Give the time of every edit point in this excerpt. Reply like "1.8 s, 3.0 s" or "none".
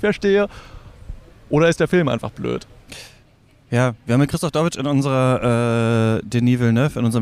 none